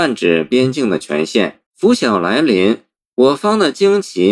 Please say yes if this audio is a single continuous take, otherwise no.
no